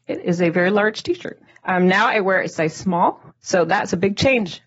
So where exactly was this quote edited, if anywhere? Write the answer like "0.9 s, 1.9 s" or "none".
1.5 s, 3.3 s